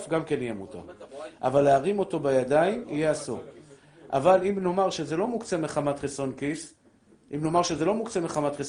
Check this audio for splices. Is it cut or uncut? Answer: uncut